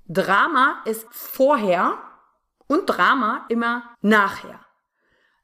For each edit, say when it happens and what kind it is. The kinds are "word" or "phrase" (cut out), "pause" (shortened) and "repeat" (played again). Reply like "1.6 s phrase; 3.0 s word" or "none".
1.1 s word; 3.5 s word; 3.9 s pause